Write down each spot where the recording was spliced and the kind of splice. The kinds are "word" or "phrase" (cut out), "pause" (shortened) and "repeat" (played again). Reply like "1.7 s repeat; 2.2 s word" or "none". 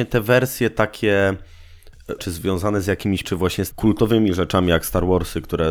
2.2 s word; 3.2 s word; 3.7 s word